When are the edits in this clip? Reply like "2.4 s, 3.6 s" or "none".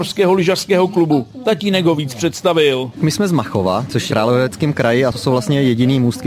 4.1 s